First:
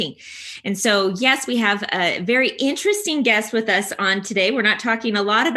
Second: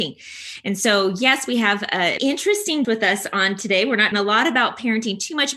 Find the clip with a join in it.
second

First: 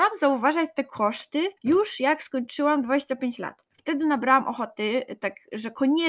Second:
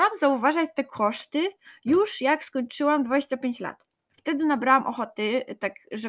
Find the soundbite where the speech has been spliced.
first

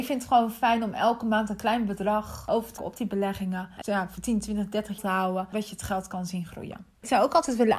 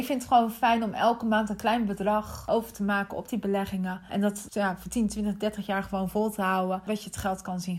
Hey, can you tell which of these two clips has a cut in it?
first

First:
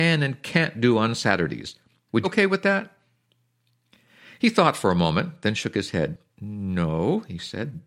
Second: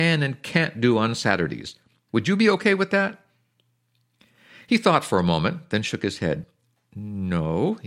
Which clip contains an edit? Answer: first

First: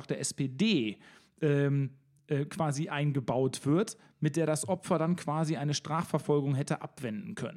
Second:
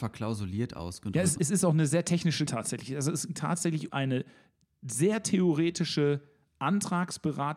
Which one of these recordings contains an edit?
second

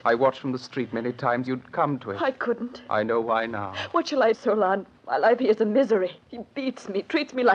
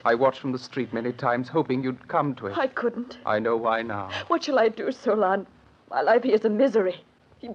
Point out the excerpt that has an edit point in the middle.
first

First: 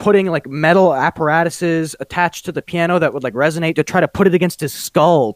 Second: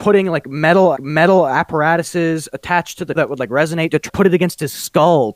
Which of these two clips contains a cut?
second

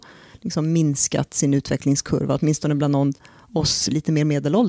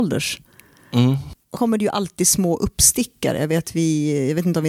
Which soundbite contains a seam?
second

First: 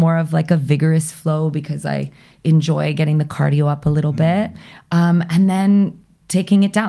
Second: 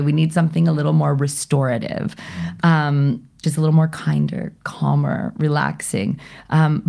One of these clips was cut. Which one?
second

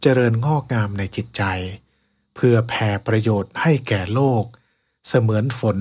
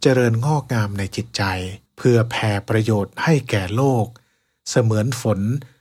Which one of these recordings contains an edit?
second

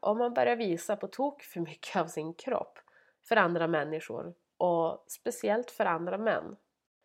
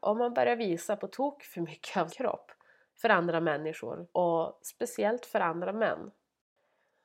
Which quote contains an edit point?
second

